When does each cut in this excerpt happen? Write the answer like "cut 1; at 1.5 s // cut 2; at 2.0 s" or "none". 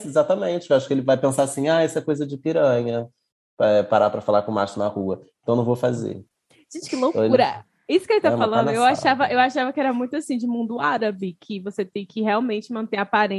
none